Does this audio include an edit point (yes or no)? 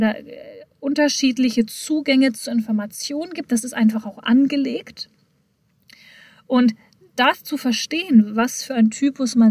no